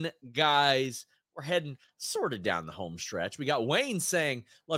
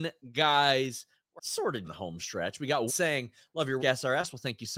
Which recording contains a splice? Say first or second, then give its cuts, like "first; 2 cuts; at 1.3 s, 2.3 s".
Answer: second; 4 cuts; at 1.4 s, 1.8 s, 2.9 s, 3.8 s